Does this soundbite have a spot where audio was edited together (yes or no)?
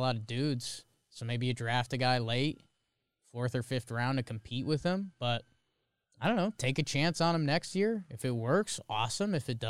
no